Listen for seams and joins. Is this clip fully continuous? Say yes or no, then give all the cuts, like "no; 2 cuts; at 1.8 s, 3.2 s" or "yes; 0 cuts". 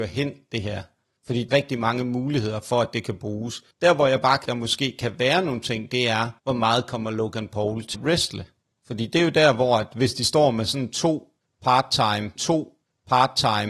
no; 6 cuts; at 1.5 s, 3.7 s, 4.5 s, 6.4 s, 7.9 s, 12.4 s